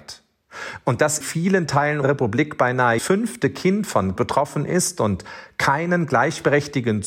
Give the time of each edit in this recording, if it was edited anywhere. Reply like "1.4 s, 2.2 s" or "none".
1.2 s, 2.0 s, 3.0 s, 4.2 s